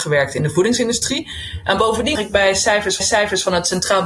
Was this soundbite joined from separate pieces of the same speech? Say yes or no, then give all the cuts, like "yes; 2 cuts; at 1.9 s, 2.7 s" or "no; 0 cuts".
yes; 2 cuts; at 2.1 s, 3.0 s